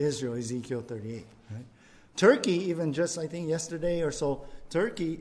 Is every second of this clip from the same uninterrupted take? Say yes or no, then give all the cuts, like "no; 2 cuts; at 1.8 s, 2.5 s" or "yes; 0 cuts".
yes; 0 cuts